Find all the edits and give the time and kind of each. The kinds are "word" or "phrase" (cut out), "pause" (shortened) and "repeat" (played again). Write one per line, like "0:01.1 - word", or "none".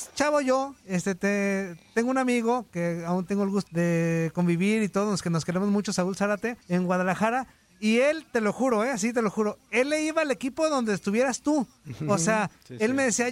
0:03.7 - word
0:06.6 - pause